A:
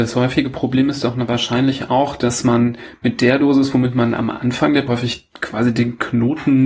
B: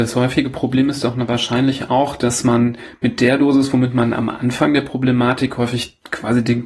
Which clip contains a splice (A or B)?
A